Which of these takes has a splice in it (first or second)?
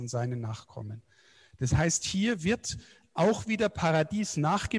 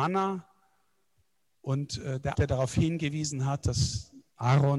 second